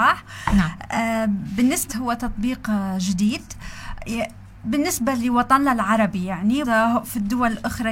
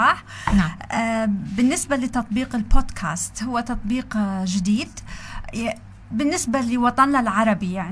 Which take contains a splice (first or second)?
first